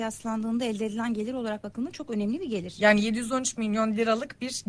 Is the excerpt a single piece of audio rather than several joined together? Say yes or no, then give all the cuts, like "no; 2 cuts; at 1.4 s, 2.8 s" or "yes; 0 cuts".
yes; 0 cuts